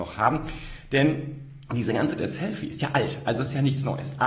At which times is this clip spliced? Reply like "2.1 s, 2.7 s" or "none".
2.2 s, 2.8 s